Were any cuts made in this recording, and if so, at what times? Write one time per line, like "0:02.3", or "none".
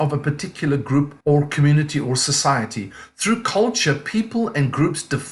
0:01.2